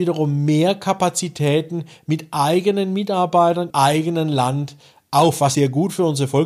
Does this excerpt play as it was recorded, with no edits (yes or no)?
no